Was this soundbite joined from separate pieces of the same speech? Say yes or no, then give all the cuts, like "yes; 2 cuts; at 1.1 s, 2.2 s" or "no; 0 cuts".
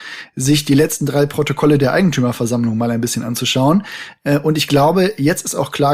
no; 0 cuts